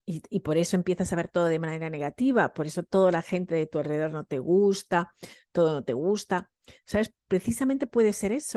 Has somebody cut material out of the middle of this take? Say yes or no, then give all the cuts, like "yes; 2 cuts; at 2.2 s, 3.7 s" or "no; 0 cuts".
no; 0 cuts